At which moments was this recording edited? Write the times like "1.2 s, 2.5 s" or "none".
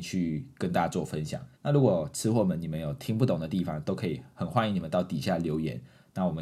1.5 s